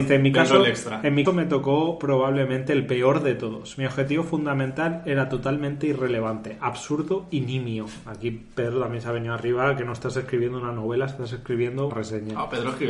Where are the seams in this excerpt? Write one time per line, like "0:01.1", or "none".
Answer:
0:01.2
0:11.9